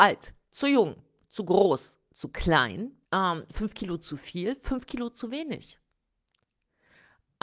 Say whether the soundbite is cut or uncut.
cut